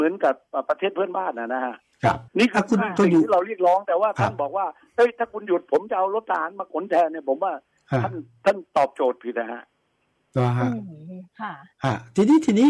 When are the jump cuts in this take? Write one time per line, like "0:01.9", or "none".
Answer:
0:01.9
0:02.3